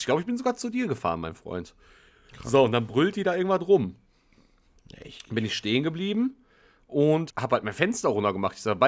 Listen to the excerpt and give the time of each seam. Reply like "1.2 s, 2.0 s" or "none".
7.3 s